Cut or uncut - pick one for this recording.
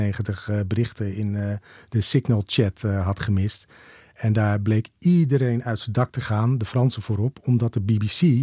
uncut